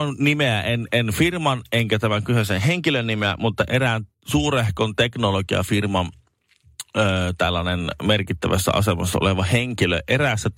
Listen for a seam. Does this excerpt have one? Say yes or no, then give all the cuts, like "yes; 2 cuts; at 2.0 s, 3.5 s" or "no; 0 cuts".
yes; 1 cut; at 4.1 s